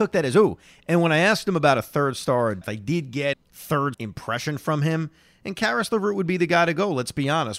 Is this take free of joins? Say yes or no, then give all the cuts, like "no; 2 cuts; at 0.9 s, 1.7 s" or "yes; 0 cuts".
no; 3 cuts; at 2.6 s, 3.3 s, 3.9 s